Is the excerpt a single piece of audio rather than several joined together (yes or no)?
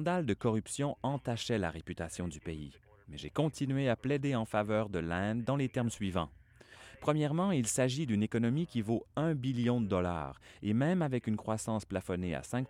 no